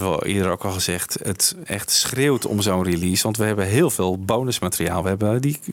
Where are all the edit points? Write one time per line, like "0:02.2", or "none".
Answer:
none